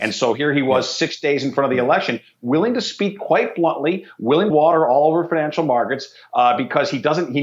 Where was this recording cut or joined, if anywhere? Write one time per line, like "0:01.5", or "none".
0:04.5